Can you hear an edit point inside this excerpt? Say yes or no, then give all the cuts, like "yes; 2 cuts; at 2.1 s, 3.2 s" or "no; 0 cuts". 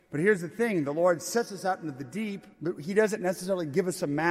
yes; 1 cut; at 2.5 s